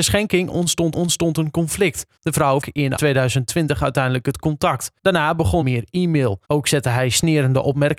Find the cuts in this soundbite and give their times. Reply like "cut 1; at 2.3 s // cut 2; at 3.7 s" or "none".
cut 1; at 0.9 s // cut 2; at 2.2 s // cut 3; at 2.6 s // cut 4; at 3.0 s // cut 5; at 5.0 s // cut 6; at 5.6 s // cut 7; at 6.4 s